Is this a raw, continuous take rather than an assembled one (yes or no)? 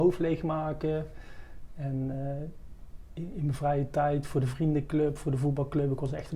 yes